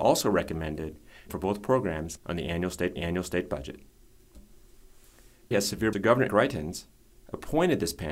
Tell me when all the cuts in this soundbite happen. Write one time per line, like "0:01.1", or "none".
0:01.3
0:02.2
0:03.0
0:05.5
0:05.9
0:06.3